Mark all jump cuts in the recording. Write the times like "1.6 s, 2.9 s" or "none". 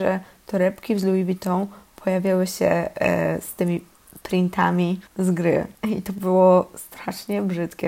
5.1 s, 5.7 s